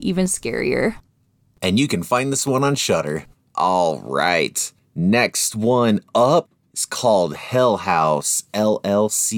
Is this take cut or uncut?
uncut